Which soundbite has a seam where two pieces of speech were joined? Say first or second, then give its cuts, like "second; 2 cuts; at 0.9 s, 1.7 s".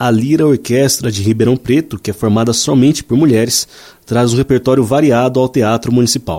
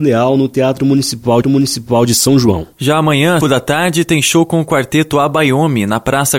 second; 2 cuts; at 1.4 s, 3.4 s